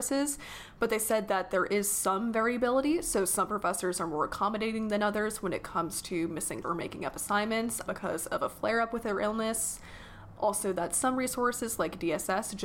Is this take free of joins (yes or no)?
no